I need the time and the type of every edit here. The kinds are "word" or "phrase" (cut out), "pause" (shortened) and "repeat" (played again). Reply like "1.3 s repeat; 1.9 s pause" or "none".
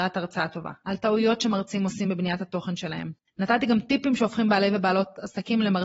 none